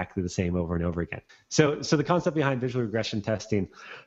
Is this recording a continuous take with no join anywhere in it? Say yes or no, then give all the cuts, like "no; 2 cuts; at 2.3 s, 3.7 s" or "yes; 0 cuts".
no; 1 cut; at 1.3 s